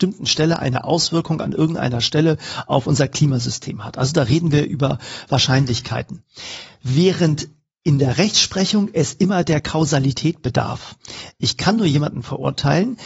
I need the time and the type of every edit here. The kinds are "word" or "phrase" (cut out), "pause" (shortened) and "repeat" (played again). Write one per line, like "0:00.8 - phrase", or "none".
none